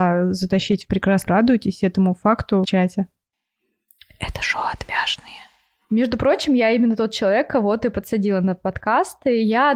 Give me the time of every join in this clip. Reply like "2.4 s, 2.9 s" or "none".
1.3 s, 2.6 s